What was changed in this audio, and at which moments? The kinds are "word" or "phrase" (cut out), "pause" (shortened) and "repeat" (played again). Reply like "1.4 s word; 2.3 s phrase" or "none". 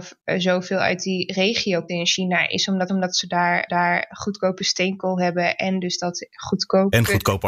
1.9 s word; 2.9 s repeat; 3.7 s repeat

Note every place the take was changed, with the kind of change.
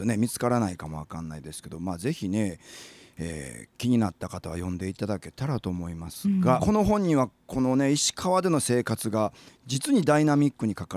6.6 s phrase

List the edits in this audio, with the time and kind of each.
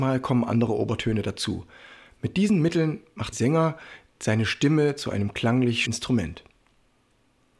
3.3 s word; 5.8 s word

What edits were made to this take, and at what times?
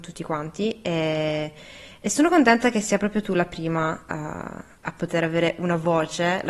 none

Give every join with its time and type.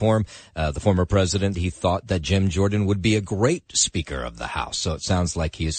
1.5 s word

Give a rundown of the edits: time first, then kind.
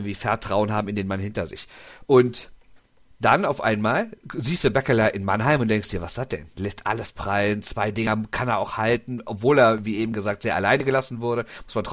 none

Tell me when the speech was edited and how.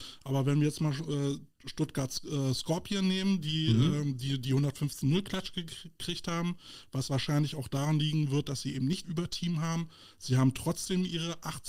9.0 s word

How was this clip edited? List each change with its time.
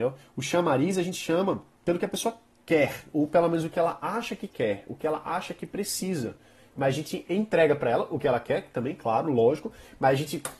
none

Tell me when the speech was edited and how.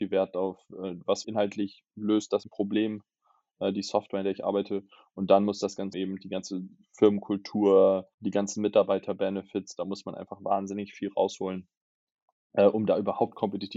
1.2 s word; 2.4 s word; 5.9 s word; 8.1 s pause

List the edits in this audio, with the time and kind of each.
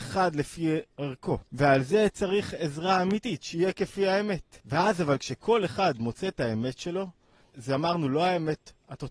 1.5 s pause; 4.6 s pause; 7.5 s word

